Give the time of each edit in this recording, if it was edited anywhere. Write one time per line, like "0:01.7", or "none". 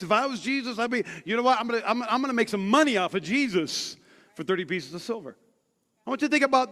none